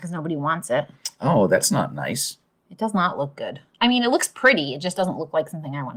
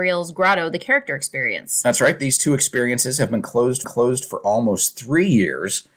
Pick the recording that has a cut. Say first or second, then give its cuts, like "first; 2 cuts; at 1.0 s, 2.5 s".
second; 1 cut; at 3.8 s